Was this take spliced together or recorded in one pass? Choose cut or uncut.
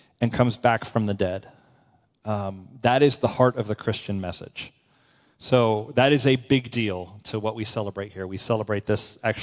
uncut